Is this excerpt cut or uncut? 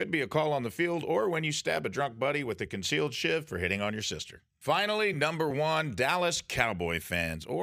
uncut